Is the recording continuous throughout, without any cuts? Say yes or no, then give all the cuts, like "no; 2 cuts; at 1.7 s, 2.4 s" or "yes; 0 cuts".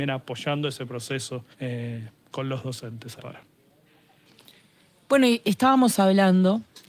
no; 2 cuts; at 1.5 s, 3.2 s